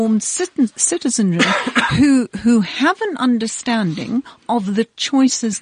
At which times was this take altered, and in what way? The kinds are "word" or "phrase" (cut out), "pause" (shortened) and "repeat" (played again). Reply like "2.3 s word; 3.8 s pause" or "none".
none